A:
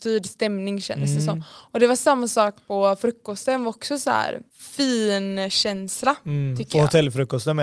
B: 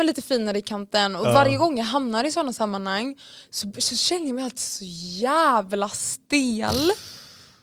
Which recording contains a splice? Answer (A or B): A